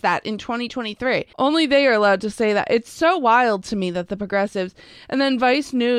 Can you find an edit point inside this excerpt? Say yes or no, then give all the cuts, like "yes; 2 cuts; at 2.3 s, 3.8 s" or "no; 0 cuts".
yes; 1 cut; at 1.3 s